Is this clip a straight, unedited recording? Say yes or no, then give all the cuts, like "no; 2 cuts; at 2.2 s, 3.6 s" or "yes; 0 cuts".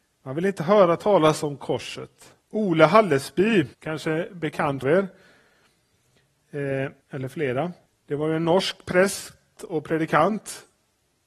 no; 5 cuts; at 2.4 s, 3.7 s, 4.8 s, 7.0 s, 7.9 s